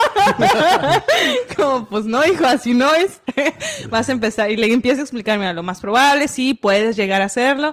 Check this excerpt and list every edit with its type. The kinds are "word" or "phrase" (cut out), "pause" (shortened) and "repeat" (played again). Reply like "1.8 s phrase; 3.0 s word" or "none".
none